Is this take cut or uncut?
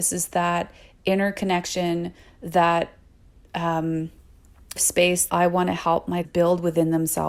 cut